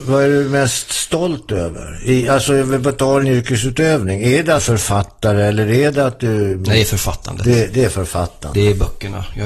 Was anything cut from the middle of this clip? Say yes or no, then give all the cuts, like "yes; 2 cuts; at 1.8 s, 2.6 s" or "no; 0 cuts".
yes; 2 cuts; at 3.2 s, 4.6 s